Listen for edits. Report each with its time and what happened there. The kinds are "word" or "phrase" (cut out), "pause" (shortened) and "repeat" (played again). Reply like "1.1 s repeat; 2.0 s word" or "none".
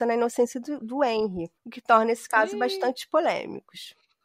1.6 s pause